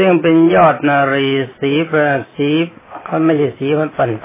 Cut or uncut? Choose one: uncut